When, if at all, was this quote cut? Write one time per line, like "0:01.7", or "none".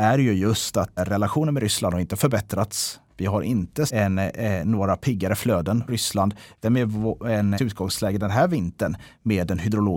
0:01.0
0:03.9
0:05.9
0:06.6
0:07.6